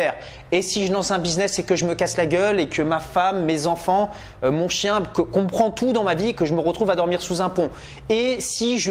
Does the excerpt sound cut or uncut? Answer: uncut